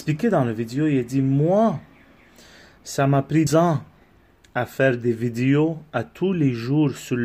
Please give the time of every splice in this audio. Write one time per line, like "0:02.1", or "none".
0:03.5